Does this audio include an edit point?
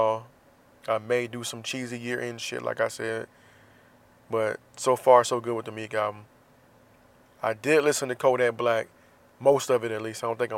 no; 0 cuts

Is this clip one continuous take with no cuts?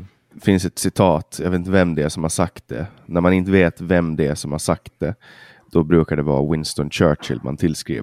yes; 0 cuts

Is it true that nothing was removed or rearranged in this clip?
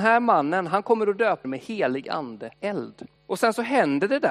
no; 3 cuts; at 1.4 s, 2.5 s, 3.2 s

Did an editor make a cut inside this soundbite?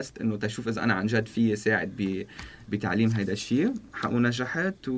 no; 0 cuts

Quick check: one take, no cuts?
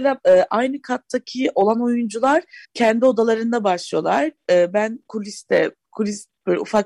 no; 1 cut; at 2.6 s

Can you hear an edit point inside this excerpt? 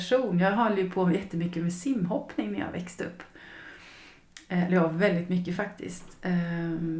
no; 0 cuts

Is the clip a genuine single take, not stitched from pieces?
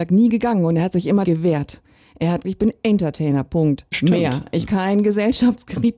no; 4 cuts; at 1.2 s, 2.4 s, 3.9 s, 4.7 s

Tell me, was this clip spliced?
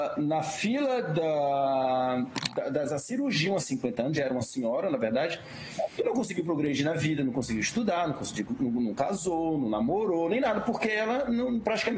yes; 1 cut; at 3.6 s

